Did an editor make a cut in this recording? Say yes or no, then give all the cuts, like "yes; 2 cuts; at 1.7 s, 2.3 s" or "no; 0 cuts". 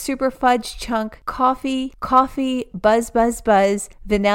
no; 0 cuts